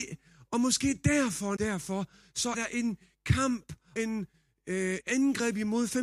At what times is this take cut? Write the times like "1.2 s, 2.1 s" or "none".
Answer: 1.6 s, 2.5 s, 4.0 s, 5.0 s